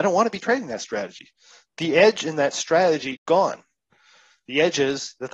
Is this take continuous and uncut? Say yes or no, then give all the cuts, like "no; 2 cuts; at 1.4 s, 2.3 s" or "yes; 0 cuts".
no; 1 cut; at 3.2 s